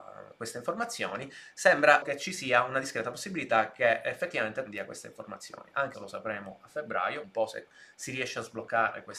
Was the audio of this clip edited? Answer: yes; 4 cuts; at 2.0 s, 4.7 s, 5.9 s, 7.2 s

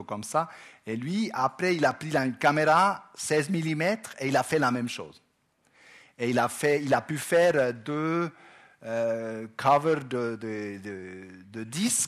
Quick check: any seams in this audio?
no; 0 cuts

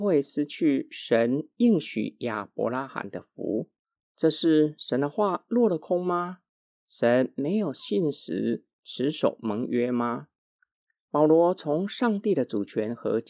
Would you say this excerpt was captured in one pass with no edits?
no; 1 cut; at 3.9 s

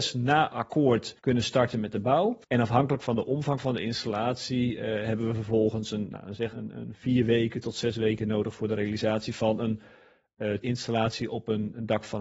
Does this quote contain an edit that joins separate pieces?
yes; 4 cuts; at 1.2 s, 2.4 s, 6.5 s, 10.6 s

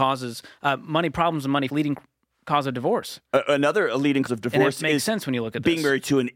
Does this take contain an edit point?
yes; 2 cuts; at 1.7 s, 4.3 s

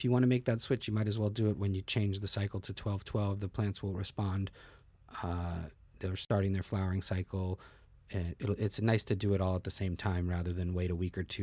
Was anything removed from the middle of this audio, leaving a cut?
no; 0 cuts

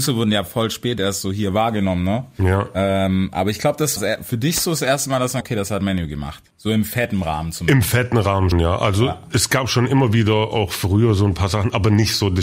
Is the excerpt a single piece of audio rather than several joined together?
no; 4 cuts; at 4.0 s, 5.4 s, 6.5 s, 8.5 s

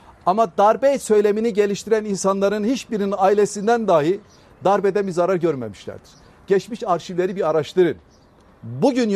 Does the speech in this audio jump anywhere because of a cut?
no; 0 cuts

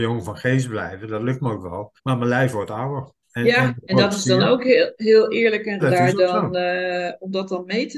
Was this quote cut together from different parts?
yes; 3 cuts; at 2.0 s, 3.2 s, 5.8 s

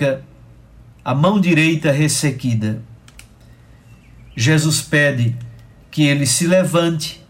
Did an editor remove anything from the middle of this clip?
no; 0 cuts

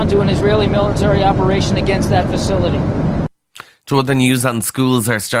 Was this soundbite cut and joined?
no; 0 cuts

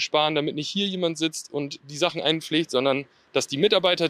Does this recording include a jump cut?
no; 0 cuts

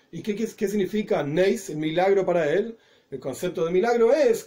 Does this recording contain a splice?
no; 0 cuts

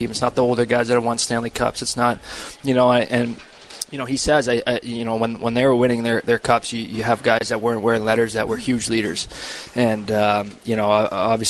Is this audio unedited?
yes; 0 cuts

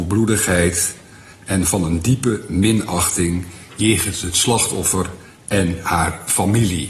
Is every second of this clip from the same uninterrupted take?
yes; 0 cuts

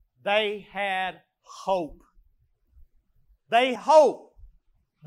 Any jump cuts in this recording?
yes; 1 cut; at 3.8 s

